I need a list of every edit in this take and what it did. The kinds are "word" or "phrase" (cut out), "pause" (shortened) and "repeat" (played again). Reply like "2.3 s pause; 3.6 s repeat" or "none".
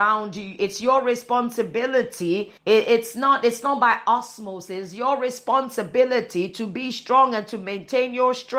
2.6 s pause